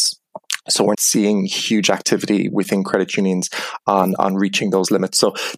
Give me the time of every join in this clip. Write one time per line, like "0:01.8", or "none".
0:00.9
0:02.5
0:04.2